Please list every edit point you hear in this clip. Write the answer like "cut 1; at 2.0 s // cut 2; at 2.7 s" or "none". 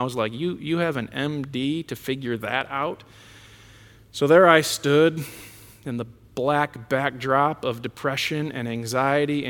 none